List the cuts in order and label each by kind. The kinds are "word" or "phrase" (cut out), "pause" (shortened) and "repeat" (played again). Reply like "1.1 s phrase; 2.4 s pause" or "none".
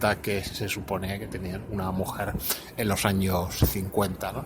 none